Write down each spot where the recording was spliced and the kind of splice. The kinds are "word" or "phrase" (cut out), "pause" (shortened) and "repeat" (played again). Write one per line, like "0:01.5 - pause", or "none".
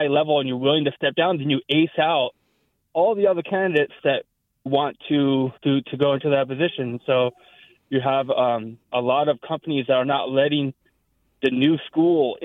0:04.7 - word
0:05.6 - pause
0:08.8 - pause